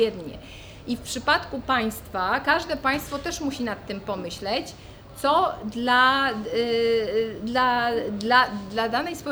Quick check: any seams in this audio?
no; 0 cuts

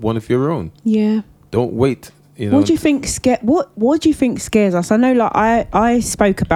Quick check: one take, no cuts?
yes; 0 cuts

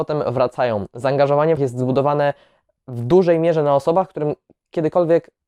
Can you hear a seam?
yes; 1 cut; at 1.6 s

